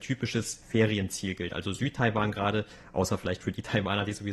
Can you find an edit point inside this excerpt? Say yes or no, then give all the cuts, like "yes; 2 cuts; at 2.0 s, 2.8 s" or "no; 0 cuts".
no; 0 cuts